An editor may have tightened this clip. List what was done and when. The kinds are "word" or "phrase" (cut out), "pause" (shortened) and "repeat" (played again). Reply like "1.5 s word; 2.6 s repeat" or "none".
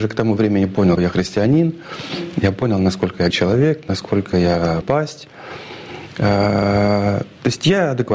1.0 s word; 3.3 s word; 4.8 s word